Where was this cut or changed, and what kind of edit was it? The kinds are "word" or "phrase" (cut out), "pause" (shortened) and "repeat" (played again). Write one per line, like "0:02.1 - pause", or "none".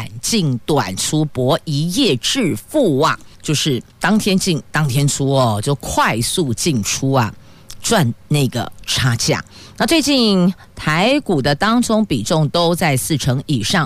0:03.3 - pause
0:03.9 - pause